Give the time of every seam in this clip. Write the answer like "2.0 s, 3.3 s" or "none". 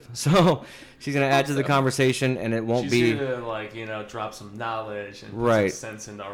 none